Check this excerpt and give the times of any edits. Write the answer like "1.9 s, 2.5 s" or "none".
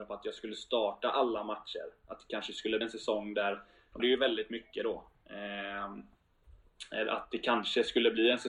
2.8 s, 4.0 s